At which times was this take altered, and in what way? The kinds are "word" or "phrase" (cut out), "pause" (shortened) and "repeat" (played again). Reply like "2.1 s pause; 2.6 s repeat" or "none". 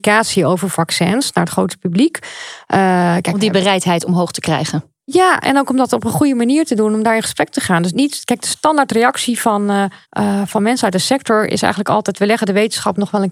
7.9 s word; 10.0 s pause